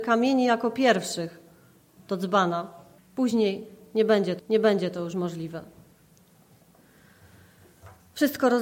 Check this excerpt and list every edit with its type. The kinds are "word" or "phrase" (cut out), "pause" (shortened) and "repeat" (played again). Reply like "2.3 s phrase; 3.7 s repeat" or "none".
3.0 s pause; 4.4 s repeat